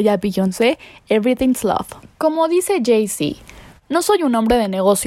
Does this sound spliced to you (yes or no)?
no